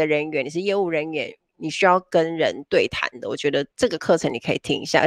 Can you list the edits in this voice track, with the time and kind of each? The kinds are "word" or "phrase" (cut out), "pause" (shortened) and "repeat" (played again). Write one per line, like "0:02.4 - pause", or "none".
0:03.7 - pause